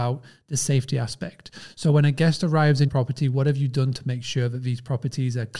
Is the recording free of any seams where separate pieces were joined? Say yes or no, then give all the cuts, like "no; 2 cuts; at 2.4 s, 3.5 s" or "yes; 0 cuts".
no; 1 cut; at 2.9 s